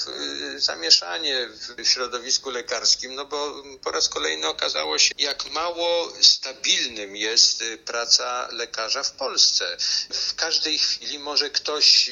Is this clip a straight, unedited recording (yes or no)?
no